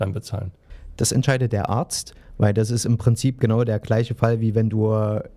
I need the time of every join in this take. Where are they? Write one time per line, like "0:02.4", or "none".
none